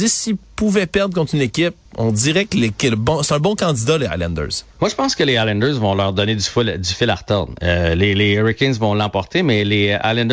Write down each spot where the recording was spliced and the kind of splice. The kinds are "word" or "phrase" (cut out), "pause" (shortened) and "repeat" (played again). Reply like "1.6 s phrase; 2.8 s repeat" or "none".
1.8 s pause; 4.7 s pause